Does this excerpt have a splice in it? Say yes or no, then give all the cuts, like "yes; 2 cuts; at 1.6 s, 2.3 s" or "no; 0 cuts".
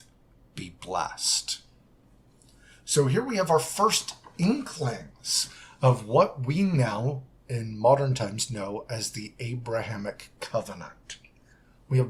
no; 0 cuts